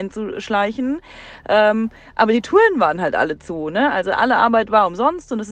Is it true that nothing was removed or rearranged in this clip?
yes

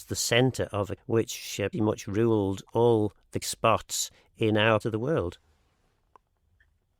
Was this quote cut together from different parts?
yes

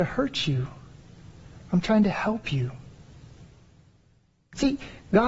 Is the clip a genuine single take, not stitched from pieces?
yes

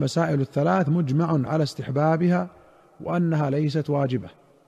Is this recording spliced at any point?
no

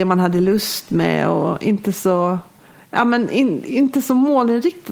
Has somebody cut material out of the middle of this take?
no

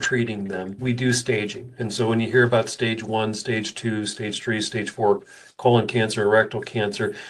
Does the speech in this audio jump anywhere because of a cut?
no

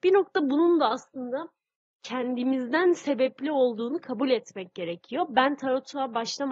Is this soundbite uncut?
yes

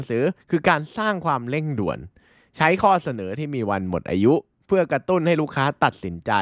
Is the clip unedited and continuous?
yes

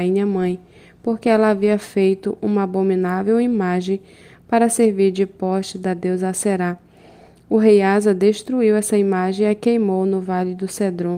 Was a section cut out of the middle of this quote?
no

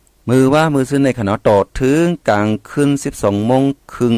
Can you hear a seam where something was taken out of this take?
no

